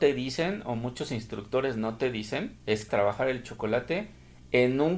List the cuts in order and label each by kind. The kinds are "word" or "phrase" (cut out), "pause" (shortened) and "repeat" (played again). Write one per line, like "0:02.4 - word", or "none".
0:02.6 - pause
0:02.9 - phrase

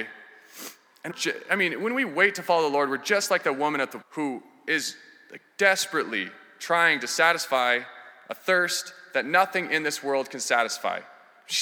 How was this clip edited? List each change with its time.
0:01.1 - word
0:04.0 - word

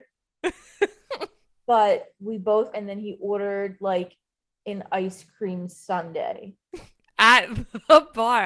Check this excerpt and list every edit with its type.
0:02.7 - phrase

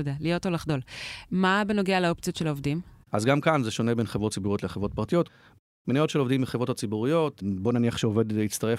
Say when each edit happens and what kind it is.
none

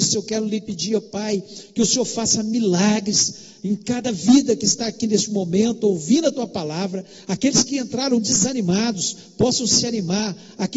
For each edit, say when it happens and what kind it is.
none

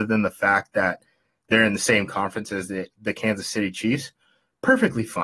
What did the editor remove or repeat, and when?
none

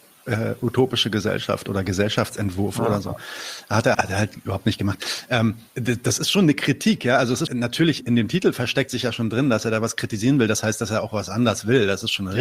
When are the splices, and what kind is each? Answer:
0:03.9 - word
0:05.7 - pause
0:07.5 - word
0:08.0 - word

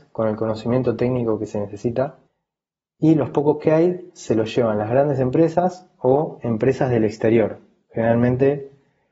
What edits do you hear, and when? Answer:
none

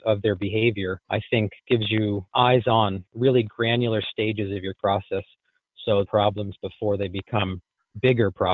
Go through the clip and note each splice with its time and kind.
0:01.0 - pause
0:02.3 - word
0:03.1 - pause
0:04.7 - word
0:06.0 - phrase

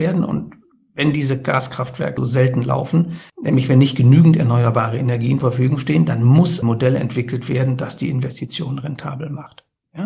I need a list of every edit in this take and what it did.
0:02.2 - word
0:03.3 - pause
0:05.4 - word
0:06.6 - word

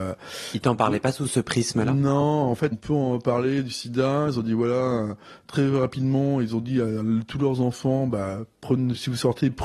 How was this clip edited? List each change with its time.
0:02.7 - word

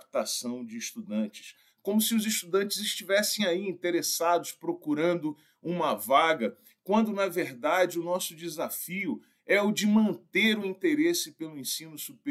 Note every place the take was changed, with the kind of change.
none

